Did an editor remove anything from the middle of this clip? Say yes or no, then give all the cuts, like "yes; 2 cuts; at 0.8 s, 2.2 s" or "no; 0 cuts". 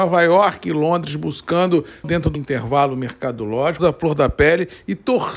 yes; 3 cuts; at 2.0 s, 2.4 s, 3.8 s